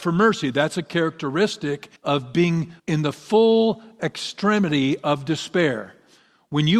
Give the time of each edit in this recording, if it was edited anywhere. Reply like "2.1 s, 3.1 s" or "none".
2.0 s, 2.8 s

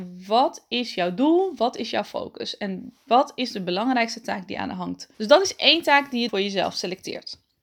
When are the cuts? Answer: 5.1 s, 6.3 s

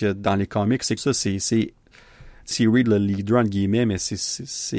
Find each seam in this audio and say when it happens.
1.0 s, 2.5 s, 2.8 s

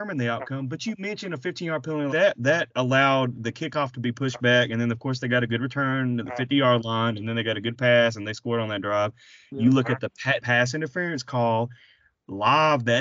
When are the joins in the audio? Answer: 2.1 s, 10.4 s

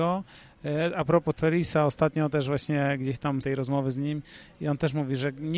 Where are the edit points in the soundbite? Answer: 1.4 s, 3.4 s

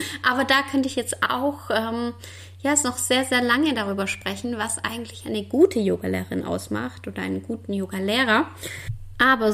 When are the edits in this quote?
none

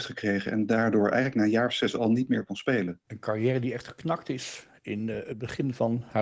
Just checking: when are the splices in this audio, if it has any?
none

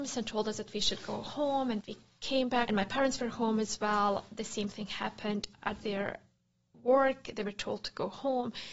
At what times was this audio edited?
1.8 s, 2.7 s, 5.5 s

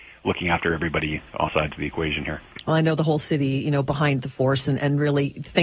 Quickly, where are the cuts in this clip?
1.5 s

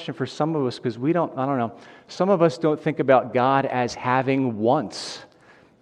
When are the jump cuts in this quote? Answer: none

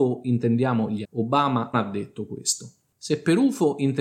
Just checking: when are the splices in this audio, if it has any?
1.0 s, 1.7 s

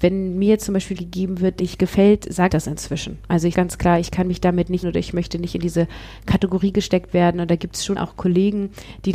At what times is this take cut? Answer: 1.0 s, 1.6 s, 2.5 s, 3.5 s, 4.8 s, 8.0 s

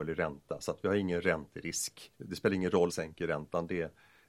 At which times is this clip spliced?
2.1 s, 2.9 s

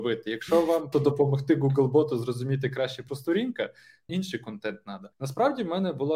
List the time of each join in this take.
0.9 s, 3.1 s, 4.1 s, 5.1 s

